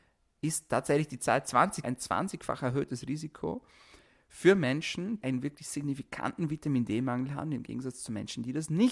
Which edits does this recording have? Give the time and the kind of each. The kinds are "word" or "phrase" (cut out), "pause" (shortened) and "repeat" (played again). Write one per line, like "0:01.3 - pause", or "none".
0:01.8 - phrase
0:05.2 - word